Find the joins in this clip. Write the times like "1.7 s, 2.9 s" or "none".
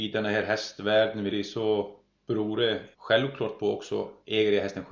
1.3 s, 2.9 s